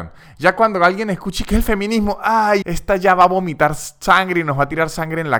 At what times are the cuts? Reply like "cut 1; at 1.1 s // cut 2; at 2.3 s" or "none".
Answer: cut 1; at 2.6 s